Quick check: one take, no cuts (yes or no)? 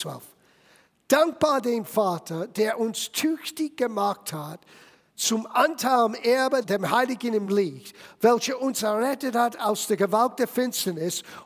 yes